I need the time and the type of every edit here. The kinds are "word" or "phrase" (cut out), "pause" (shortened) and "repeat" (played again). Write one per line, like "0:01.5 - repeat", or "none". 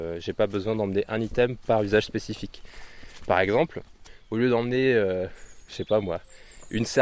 none